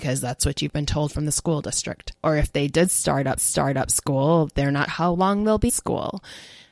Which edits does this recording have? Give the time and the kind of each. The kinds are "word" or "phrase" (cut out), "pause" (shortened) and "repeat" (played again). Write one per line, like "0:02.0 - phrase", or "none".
0:02.2 - pause
0:03.4 - repeat
0:04.9 - word
0:05.7 - word

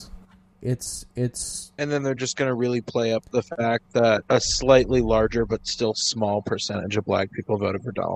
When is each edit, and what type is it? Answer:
none

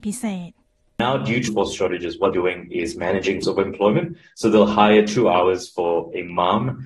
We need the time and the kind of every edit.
0:01.5 - word
0:02.3 - word
0:03.4 - word

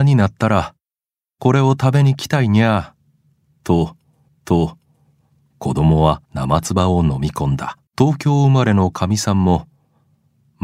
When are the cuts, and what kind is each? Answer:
0:04.3 - repeat
0:06.2 - pause
0:07.9 - pause

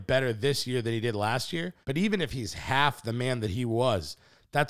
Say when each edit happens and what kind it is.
0:01.8 - pause

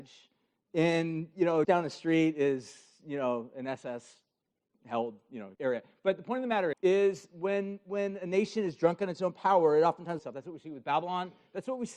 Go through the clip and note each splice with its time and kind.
0:01.6 - word
0:05.5 - pause
0:06.7 - word
0:10.2 - phrase

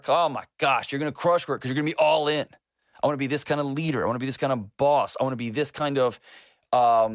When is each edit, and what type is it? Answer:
none

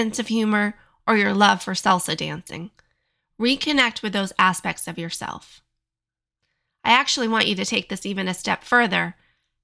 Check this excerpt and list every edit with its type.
none

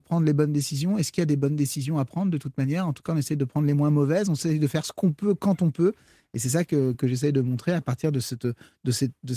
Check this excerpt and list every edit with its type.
0:06.9 - word

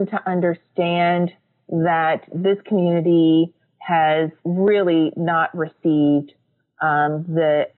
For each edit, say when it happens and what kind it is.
0:04.4 - pause

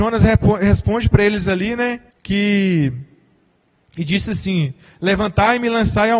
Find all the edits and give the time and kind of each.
0:02.1 - pause

